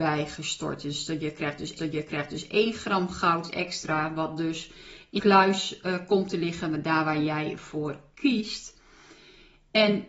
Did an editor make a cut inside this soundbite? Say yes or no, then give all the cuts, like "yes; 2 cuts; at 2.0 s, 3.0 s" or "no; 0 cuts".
yes; 2 cuts; at 1.8 s, 5.2 s